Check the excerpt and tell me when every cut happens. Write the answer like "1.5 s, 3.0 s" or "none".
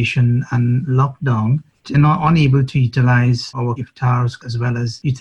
1.9 s, 3.8 s